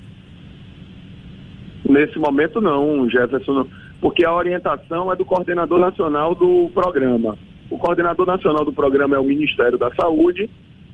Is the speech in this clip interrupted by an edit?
no; 0 cuts

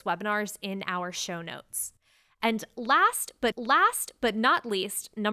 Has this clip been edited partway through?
yes; 1 cut; at 3.5 s

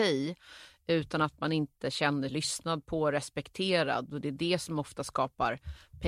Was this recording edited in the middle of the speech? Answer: yes; 1 cut; at 2.3 s

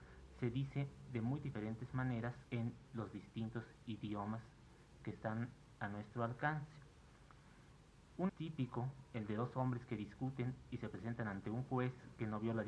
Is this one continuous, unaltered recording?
no; 2 cuts; at 2.4 s, 8.3 s

